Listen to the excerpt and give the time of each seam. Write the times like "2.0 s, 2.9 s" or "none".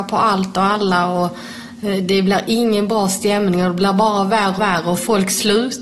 4.6 s

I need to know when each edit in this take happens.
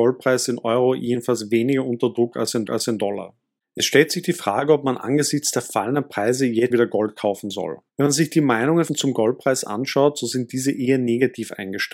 2.7 s, 6.7 s, 7.9 s, 8.9 s

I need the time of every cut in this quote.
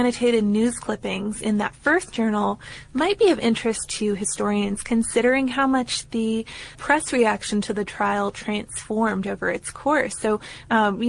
6.7 s

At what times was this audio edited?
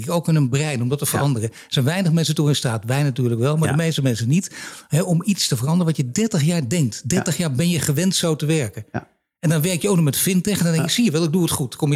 none

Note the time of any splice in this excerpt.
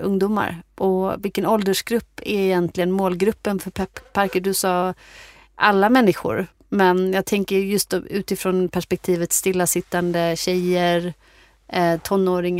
none

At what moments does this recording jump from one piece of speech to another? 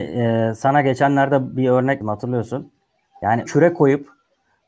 2.0 s, 3.5 s

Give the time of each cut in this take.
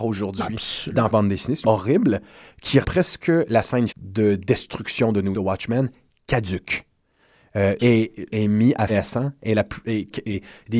1.1 s, 1.6 s, 2.8 s, 3.9 s, 5.3 s, 7.8 s, 8.3 s, 8.9 s

